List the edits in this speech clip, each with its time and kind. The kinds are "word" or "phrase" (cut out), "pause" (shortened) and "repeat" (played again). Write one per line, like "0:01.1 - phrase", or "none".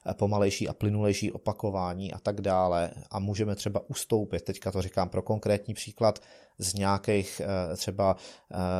none